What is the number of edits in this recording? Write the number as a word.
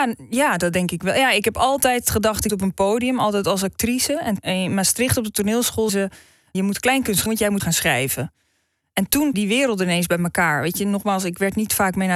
seven